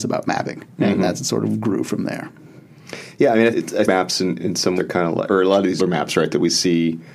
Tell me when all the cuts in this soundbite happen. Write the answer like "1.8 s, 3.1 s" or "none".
3.5 s, 3.8 s, 4.4 s, 4.8 s, 5.3 s, 5.8 s